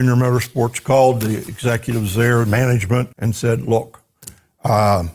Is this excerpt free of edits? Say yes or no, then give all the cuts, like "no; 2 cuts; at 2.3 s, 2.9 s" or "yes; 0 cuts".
no; 1 cut; at 3.1 s